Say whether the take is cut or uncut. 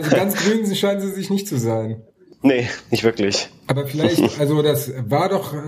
uncut